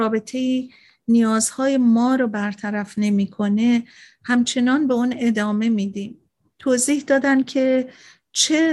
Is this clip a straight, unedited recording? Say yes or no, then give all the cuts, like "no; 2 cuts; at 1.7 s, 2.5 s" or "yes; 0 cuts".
yes; 0 cuts